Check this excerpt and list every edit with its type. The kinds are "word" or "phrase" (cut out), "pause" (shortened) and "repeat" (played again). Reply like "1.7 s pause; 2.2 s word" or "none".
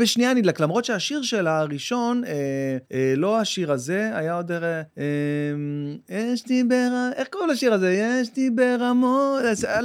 2.8 s pause; 4.9 s pause